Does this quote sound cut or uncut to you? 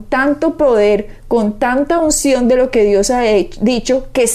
uncut